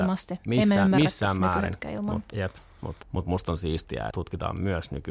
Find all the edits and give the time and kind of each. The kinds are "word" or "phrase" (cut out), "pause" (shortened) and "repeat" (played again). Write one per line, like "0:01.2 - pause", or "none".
0:02.3 - word
0:03.0 - word
0:04.1 - word